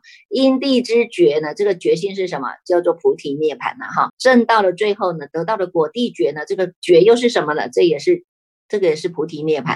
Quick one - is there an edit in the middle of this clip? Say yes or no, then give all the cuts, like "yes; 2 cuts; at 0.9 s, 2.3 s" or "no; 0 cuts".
yes; 1 cut; at 4.1 s